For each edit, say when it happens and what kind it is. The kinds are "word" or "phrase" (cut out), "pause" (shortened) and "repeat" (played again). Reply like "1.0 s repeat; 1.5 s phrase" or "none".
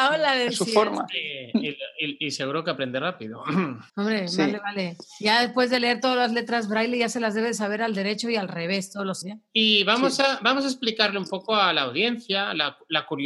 3.9 s pause; 9.2 s word